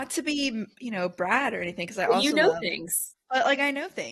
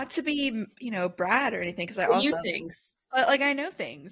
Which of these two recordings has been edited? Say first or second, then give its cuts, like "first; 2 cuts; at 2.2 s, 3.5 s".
second; 1 cut; at 2.3 s